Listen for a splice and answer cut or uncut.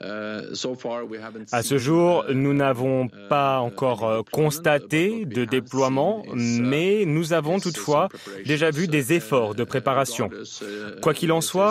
uncut